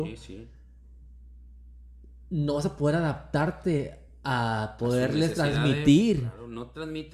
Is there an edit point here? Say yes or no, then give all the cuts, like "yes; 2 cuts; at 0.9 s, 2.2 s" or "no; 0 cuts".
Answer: no; 0 cuts